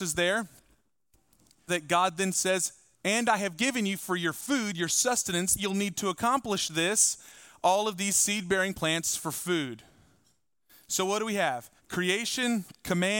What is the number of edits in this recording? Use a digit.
4